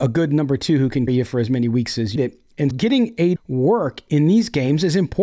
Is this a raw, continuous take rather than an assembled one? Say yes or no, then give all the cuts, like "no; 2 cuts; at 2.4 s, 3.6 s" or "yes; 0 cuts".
no; 4 cuts; at 1.1 s, 2.2 s, 2.7 s, 3.4 s